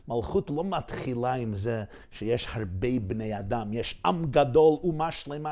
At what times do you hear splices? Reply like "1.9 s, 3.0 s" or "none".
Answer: none